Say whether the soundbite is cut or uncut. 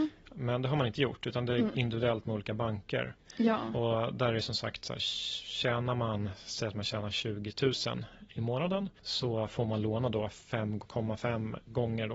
uncut